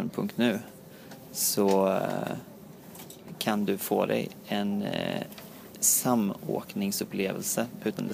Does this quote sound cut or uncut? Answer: uncut